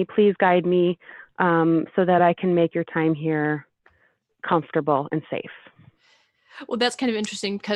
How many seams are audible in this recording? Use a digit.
0